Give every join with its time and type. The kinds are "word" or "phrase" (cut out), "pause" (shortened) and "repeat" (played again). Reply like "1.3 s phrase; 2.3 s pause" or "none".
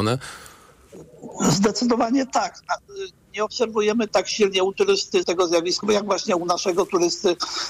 4.1 s word; 5.2 s word; 5.8 s word